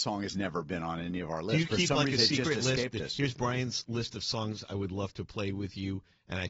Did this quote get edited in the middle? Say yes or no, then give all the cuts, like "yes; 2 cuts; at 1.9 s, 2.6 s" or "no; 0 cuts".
no; 0 cuts